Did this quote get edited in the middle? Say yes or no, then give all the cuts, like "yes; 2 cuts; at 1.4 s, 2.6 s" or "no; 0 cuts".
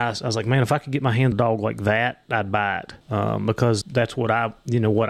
yes; 3 cuts; at 1.3 s, 3.0 s, 3.8 s